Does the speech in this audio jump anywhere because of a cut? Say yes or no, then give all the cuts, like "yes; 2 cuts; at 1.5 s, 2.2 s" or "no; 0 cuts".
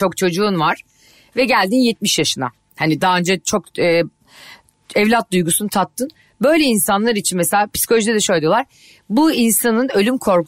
no; 0 cuts